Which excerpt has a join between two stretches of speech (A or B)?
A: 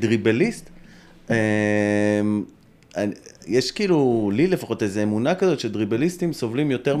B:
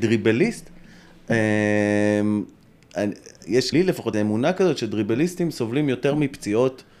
B